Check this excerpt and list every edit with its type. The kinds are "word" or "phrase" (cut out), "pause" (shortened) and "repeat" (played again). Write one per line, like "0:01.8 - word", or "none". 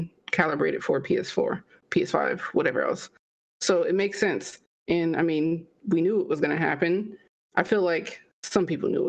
none

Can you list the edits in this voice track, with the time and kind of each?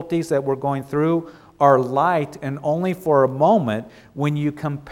none

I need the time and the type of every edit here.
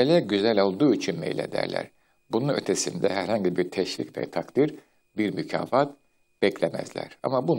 none

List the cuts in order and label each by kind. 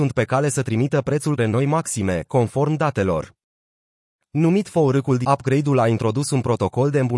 0:01.4 - word
0:05.2 - word

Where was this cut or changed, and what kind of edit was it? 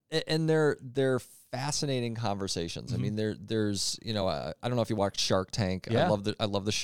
none

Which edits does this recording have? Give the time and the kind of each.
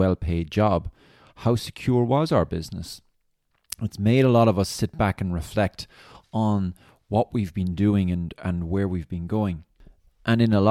none

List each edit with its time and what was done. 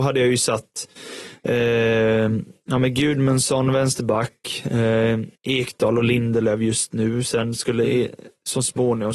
0:05.4 - pause

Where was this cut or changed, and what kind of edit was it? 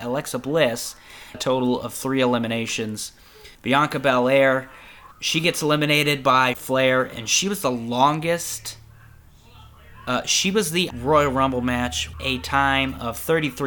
0:01.3 - word
0:03.5 - pause
0:05.1 - pause
0:06.5 - word
0:10.9 - phrase
0:12.1 - word

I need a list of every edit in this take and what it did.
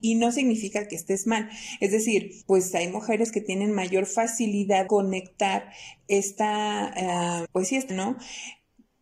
0:02.4 - pause
0:04.9 - word
0:07.4 - word
0:07.9 - word

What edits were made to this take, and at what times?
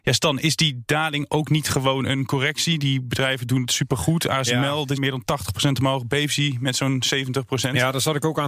0:05.0 - word

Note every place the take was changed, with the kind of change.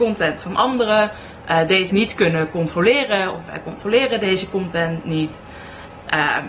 0:01.9 - phrase

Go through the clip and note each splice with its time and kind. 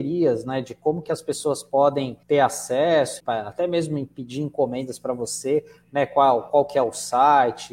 0:02.2 - pause
0:03.2 - word

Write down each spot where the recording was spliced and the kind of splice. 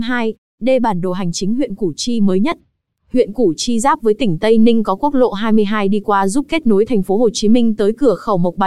none

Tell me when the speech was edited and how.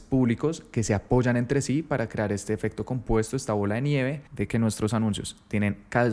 0:04.3 - pause

